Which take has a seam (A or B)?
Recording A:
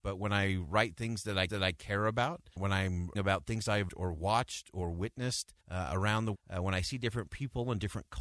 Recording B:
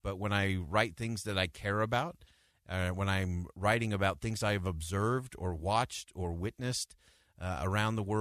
A